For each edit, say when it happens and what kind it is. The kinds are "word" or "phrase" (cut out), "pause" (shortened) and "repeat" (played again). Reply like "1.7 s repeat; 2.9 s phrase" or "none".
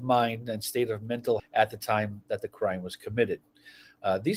1.4 s word